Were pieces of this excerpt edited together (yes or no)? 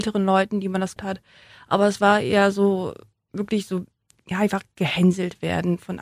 yes